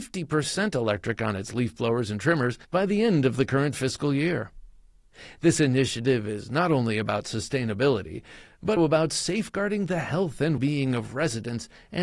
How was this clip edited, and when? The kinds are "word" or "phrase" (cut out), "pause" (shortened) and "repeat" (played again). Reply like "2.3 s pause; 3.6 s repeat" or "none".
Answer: 2.6 s pause; 8.8 s word; 10.6 s word